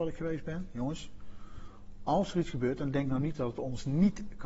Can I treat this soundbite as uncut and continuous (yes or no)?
yes